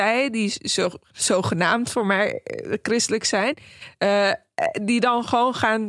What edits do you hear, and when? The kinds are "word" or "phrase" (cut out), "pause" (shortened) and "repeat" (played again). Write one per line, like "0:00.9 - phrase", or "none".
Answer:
none